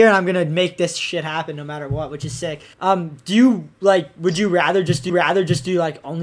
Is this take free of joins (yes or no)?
no